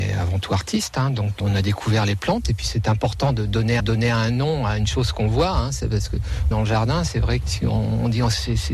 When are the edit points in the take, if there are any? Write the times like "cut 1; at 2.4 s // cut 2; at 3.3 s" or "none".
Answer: cut 1; at 1.4 s // cut 2; at 3.8 s // cut 3; at 6.5 s // cut 4; at 7.4 s